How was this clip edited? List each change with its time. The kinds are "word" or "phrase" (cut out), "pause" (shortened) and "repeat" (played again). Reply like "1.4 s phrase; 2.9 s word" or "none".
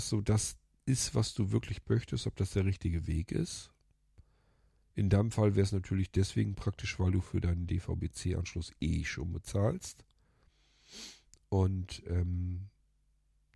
none